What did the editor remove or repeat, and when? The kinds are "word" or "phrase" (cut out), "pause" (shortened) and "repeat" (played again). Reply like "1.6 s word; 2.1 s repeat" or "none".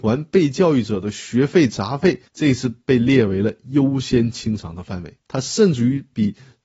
2.3 s pause; 5.2 s pause

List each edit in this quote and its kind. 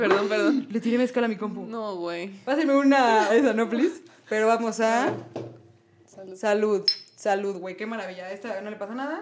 3.3 s word

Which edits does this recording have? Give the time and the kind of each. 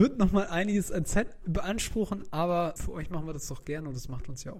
2.8 s word

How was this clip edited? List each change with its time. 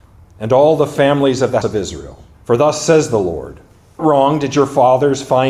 1.6 s word; 2.3 s pause; 4.0 s word

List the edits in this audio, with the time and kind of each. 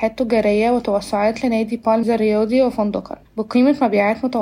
2.0 s word; 3.3 s pause

